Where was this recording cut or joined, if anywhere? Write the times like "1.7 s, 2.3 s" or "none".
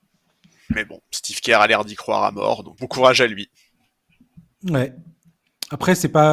2.8 s